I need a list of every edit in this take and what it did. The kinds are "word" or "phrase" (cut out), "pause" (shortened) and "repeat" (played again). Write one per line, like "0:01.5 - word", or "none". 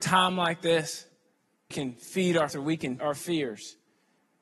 0:01.7 - word
0:02.5 - word
0:03.0 - word